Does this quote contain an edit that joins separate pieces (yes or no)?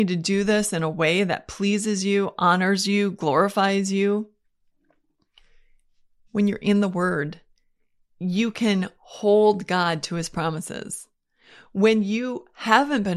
no